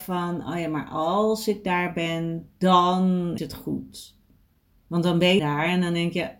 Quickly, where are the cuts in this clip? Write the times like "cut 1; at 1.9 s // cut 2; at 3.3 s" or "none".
cut 1; at 3.4 s // cut 2; at 5.4 s